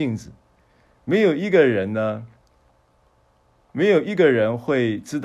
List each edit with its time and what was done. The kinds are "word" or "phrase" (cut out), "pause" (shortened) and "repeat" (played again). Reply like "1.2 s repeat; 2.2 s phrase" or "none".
none